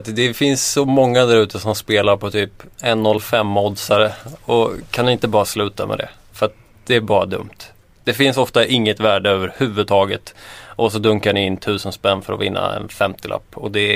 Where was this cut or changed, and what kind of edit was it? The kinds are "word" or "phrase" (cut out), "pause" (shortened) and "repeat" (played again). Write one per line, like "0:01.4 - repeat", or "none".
none